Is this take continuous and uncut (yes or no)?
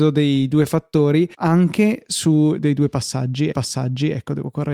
no